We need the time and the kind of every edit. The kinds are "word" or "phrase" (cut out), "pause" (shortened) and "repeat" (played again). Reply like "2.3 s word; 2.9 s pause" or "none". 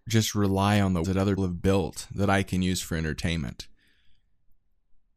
1.0 s word; 1.4 s word